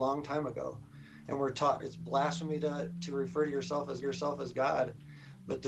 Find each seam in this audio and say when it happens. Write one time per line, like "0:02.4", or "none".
0:01.8
0:04.0

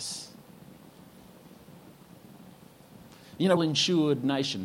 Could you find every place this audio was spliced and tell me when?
0:03.6

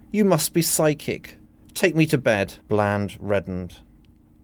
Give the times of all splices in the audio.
0:01.4
0:02.6

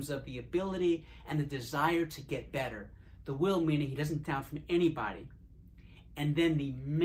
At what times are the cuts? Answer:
0:04.2

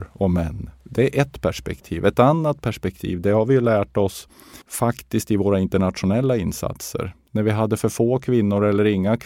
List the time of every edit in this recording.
0:04.6

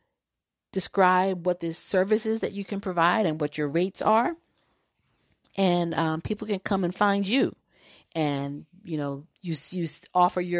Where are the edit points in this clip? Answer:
none

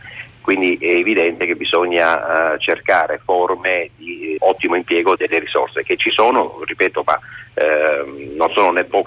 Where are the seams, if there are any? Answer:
0:04.4
0:05.2

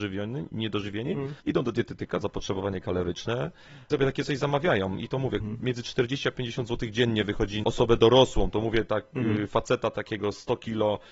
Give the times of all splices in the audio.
0:01.4
0:02.2
0:03.9
0:05.4
0:07.6

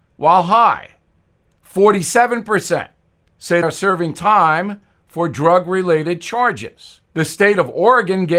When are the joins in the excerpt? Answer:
0:03.6
0:07.0

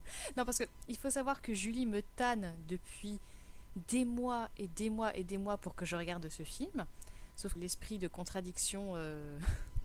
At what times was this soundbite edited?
0:07.6

